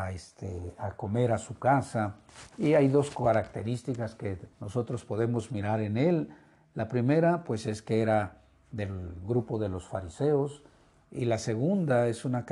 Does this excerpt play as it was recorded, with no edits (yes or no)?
no